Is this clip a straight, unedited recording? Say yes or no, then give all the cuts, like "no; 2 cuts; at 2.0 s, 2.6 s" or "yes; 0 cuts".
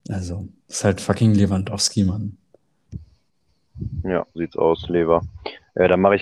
no; 1 cut; at 4.3 s